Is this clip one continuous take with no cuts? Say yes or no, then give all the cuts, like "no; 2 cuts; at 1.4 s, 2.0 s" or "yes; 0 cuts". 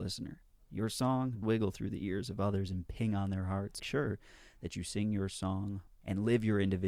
no; 3 cuts; at 1.4 s, 3.8 s, 5.9 s